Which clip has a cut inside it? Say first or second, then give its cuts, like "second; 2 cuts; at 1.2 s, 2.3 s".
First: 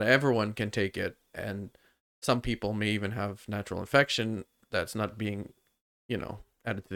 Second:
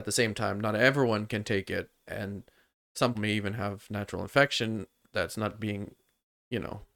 second; 1 cut; at 3.1 s